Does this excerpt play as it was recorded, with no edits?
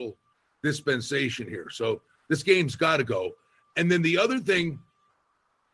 yes; 0 cuts

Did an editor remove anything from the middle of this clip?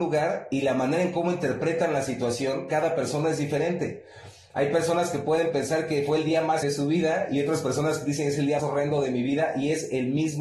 yes; 2 cuts; at 6.6 s, 8.6 s

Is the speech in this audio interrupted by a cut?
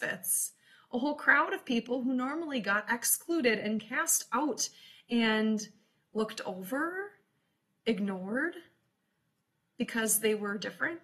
no; 0 cuts

